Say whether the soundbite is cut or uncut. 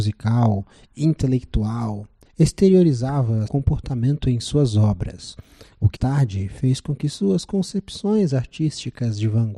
cut